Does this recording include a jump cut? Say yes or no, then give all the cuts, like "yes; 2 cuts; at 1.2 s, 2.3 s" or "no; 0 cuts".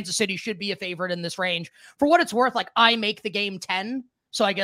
no; 0 cuts